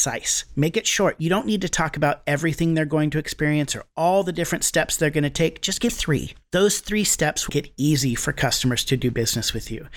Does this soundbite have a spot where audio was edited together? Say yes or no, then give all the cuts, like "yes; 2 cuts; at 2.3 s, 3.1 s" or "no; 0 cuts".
yes; 2 cuts; at 5.9 s, 7.5 s